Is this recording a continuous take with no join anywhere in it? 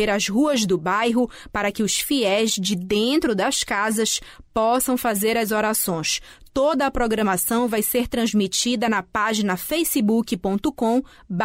yes; 0 cuts

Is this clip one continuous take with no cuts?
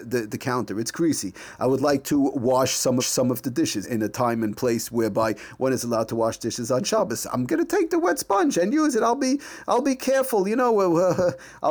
no; 3 cuts; at 3.0 s, 3.8 s, 7.5 s

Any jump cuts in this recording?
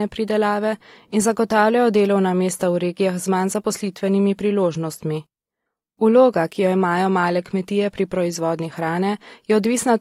yes; 1 cut; at 5.7 s

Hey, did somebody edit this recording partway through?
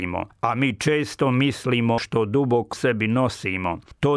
yes; 2 cuts; at 2.0 s, 2.7 s

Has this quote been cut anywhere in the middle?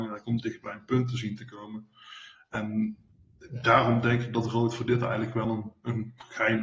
no; 0 cuts

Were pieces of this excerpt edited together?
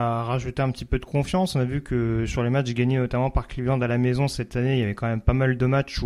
no; 0 cuts

